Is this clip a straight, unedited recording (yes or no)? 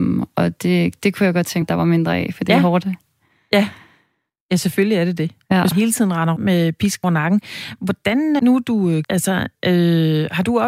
no